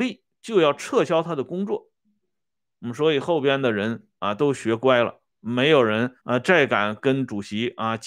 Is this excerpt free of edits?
no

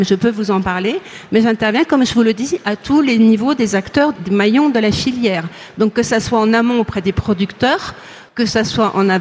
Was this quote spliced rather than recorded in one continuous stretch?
yes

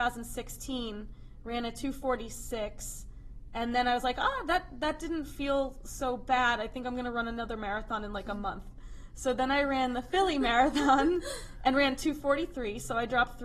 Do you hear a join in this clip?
no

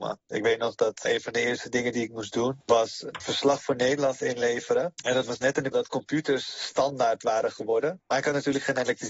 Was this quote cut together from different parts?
yes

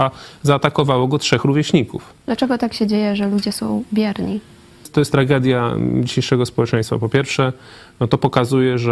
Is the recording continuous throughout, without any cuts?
yes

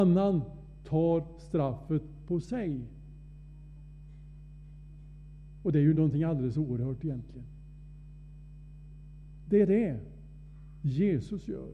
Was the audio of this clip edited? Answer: no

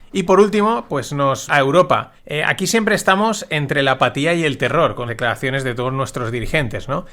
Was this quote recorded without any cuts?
no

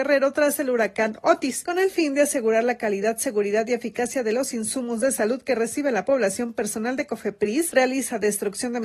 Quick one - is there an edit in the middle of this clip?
no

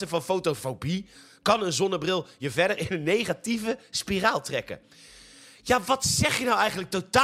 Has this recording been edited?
no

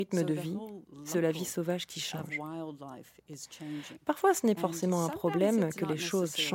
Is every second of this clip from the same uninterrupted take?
no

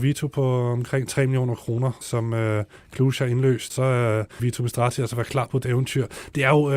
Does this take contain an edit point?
yes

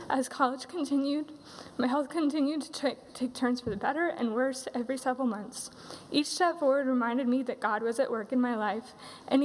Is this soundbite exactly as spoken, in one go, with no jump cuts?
yes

